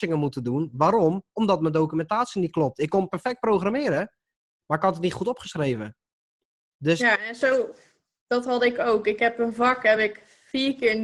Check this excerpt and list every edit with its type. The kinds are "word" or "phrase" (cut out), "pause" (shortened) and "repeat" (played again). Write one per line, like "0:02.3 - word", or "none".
none